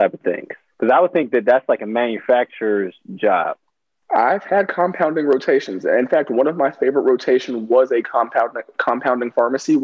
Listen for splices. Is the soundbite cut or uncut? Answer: uncut